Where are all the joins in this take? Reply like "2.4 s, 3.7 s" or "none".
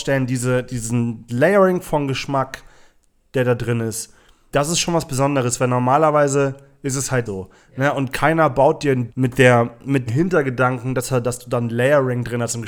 1.3 s, 4.5 s, 7.3 s, 9.1 s, 10.1 s